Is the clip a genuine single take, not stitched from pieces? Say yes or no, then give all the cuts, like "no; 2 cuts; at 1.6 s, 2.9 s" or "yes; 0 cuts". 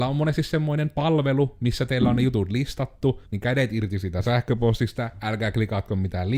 no; 1 cut; at 3.3 s